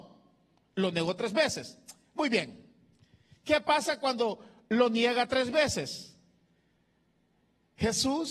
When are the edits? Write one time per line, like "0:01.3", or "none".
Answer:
none

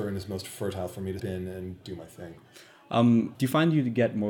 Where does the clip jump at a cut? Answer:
0:01.2
0:03.3

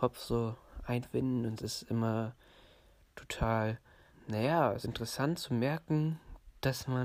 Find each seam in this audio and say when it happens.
0:01.6
0:04.1
0:04.8

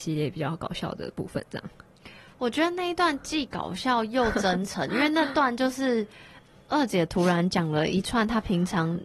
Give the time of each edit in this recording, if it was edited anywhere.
none

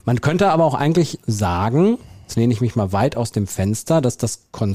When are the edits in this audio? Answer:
0:01.2

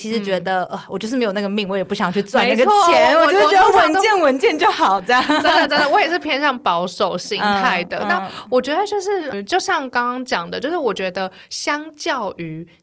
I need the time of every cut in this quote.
0:09.3

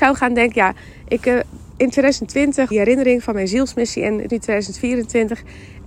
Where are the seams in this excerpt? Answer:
0:02.7
0:04.3

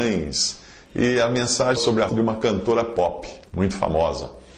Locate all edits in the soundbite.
0:01.8
0:02.1
0:03.5

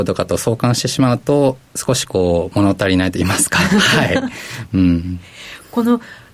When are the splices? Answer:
0:01.6

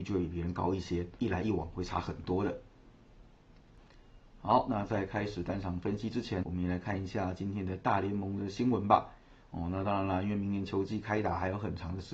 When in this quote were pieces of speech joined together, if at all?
0:01.2
0:06.4

